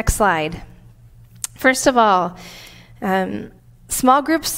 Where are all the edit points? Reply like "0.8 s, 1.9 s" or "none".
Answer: 3.6 s